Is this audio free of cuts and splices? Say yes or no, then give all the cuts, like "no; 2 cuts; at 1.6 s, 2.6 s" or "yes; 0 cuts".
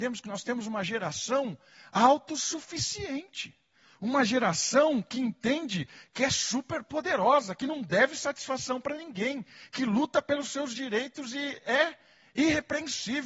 yes; 0 cuts